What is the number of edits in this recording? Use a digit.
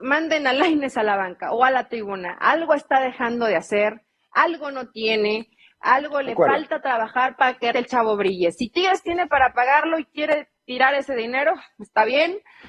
1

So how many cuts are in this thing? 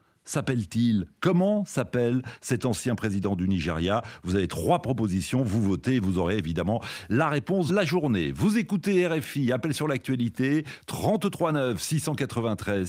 1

